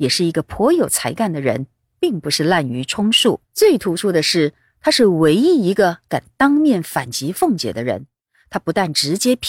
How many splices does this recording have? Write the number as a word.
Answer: one